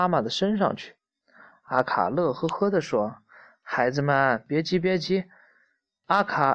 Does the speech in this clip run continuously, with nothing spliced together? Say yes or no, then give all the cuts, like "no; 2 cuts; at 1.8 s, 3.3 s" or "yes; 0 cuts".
yes; 0 cuts